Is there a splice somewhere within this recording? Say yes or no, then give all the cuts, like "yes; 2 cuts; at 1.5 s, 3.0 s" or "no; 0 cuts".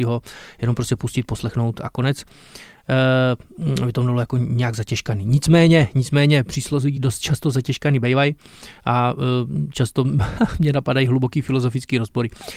no; 0 cuts